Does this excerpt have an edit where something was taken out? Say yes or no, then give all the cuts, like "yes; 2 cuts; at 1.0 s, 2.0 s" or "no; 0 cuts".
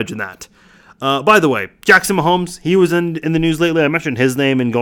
no; 0 cuts